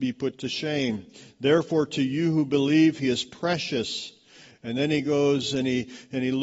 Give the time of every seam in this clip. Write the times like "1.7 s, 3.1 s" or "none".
none